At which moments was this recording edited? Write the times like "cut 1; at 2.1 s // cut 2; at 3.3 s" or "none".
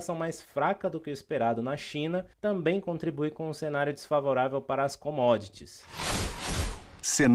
cut 1; at 2.3 s